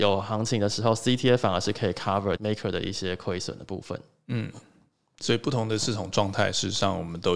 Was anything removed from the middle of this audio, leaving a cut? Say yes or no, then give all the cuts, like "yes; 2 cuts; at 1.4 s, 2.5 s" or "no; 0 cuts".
yes; 1 cut; at 2.4 s